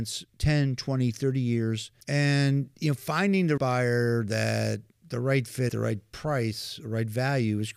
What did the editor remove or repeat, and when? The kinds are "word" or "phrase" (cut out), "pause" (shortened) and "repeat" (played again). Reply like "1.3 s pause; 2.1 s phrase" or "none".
2.0 s pause; 3.6 s word; 5.7 s word